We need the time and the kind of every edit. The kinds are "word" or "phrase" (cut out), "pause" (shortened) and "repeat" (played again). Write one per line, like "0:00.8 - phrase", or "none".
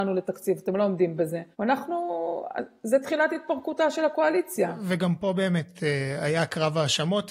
0:01.5 - pause